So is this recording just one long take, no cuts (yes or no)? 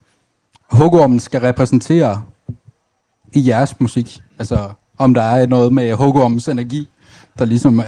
yes